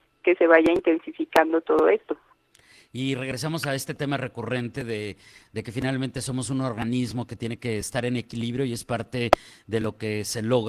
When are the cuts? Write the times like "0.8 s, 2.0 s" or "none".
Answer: none

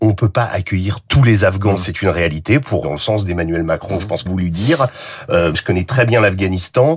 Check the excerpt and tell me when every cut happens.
2.8 s, 4.3 s, 5.5 s

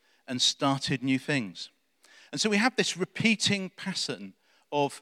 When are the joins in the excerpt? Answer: none

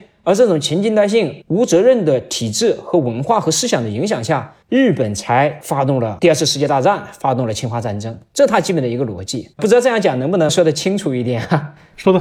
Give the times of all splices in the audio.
1.4 s, 4.6 s, 9.5 s

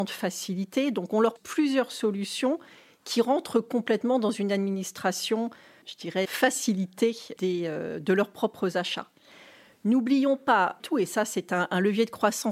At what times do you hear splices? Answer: 1.4 s, 5.8 s, 6.2 s, 7.4 s, 10.8 s

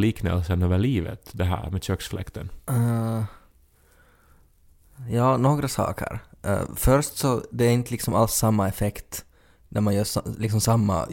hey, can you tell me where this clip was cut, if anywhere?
none

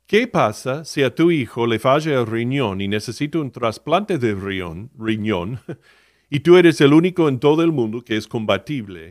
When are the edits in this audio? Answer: none

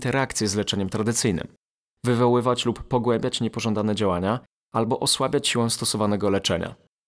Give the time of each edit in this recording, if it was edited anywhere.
none

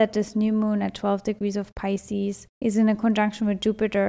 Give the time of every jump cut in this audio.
2.5 s

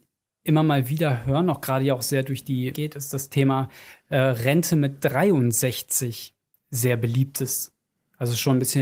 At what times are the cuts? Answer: 2.7 s

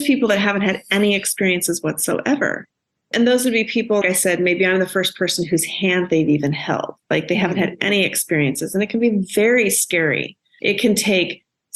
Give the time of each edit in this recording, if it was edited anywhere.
4.0 s

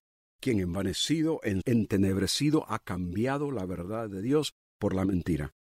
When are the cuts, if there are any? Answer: 1.6 s

